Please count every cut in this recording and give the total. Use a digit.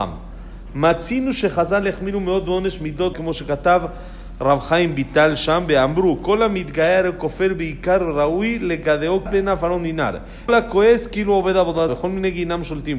4